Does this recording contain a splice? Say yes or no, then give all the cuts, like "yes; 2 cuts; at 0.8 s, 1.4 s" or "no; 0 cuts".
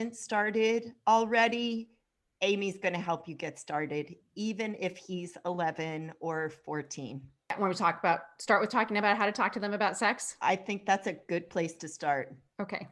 yes; 1 cut; at 1.0 s